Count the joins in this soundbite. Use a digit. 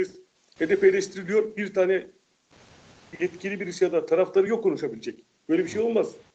0